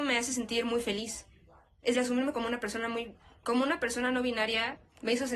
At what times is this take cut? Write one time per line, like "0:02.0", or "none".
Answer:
0:01.9